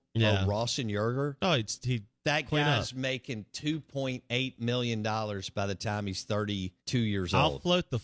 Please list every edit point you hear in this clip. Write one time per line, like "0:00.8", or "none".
0:06.8